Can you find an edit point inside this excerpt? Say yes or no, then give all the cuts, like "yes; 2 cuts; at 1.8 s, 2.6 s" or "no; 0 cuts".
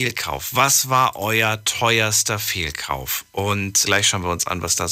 yes; 1 cut; at 3.8 s